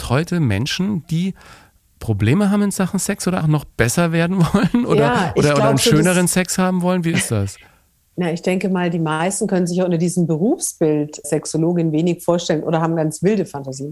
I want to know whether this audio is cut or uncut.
cut